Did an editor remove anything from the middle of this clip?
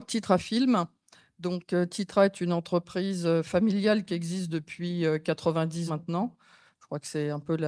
yes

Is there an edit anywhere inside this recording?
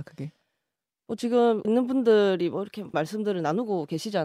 yes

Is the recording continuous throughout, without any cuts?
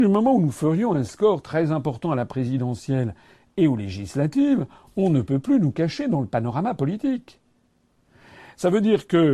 yes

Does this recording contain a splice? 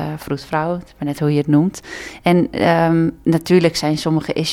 no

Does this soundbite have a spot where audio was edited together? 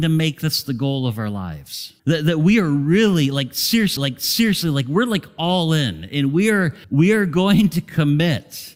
yes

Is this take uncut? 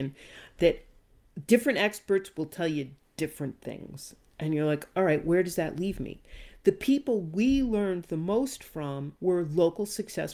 no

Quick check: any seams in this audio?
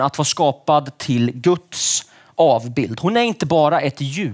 no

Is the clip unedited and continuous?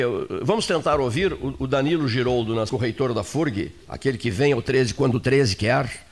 no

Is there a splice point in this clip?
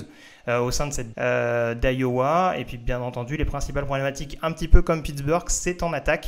yes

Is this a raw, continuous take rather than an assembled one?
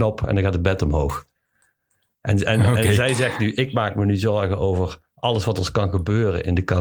yes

